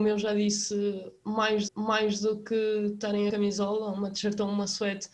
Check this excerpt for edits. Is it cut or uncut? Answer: cut